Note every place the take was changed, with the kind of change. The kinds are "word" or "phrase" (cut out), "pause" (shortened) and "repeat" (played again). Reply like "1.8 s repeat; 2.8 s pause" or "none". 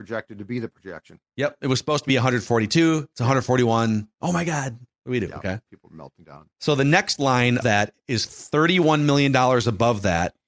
1.3 s pause; 2.1 s word; 4.1 s pause; 6.5 s pause; 7.6 s word